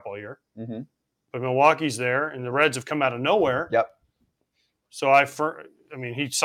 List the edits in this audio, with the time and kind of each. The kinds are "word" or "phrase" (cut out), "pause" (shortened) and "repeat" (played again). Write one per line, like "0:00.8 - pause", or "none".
none